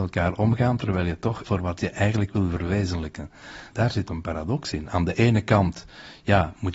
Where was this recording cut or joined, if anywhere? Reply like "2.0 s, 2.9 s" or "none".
1.4 s, 3.7 s, 4.1 s